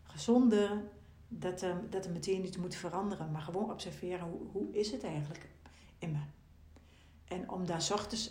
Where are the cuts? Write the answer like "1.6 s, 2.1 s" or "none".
none